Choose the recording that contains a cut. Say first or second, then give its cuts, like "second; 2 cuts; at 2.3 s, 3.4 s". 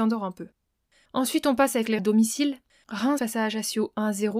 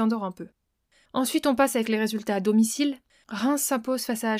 first; 2 cuts; at 2.0 s, 3.2 s